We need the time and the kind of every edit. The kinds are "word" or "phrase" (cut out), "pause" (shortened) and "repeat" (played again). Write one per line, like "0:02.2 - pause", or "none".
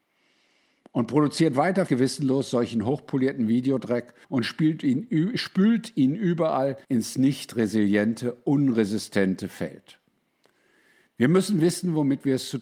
0:01.9 - word
0:04.2 - pause
0:06.8 - pause

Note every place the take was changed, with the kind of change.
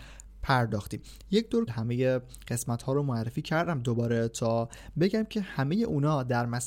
0:01.7 - word

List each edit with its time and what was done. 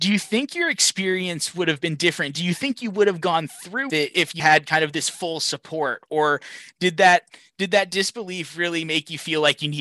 0:03.9 - word
0:04.4 - word

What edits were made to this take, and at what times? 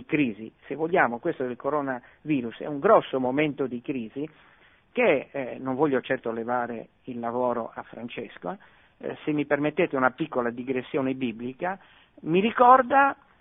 none

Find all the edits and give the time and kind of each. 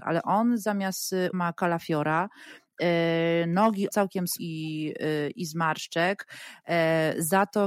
0:01.3 - word
0:03.9 - word
0:04.4 - phrase

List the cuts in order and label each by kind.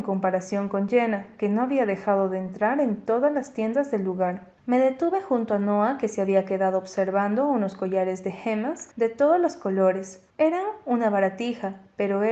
0:04.6 - pause
0:08.9 - pause
0:10.3 - pause

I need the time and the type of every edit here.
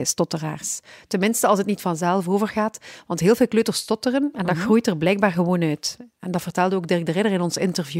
none

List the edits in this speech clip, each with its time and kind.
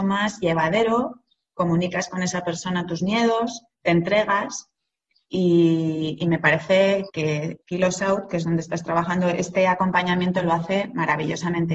0:07.1 - word
0:07.6 - pause

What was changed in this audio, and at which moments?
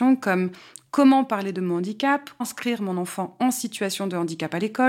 0:02.4 - word

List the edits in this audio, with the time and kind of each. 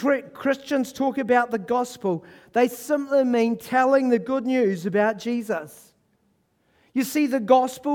none

